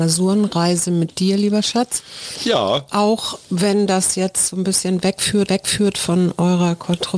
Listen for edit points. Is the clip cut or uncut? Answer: cut